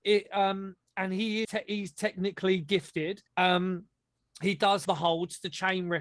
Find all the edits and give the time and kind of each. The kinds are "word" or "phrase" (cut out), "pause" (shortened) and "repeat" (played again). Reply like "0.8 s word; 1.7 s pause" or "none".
1.4 s word; 3.3 s pause; 4.8 s word